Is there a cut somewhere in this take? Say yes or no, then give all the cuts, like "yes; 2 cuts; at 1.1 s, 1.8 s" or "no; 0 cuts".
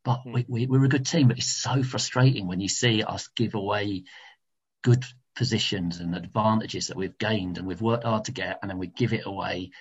no; 0 cuts